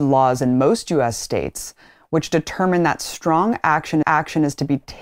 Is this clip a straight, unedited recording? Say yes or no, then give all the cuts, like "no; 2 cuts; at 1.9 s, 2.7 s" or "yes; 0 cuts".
no; 1 cut; at 4.0 s